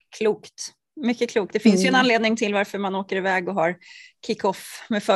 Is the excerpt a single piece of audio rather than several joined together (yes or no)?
yes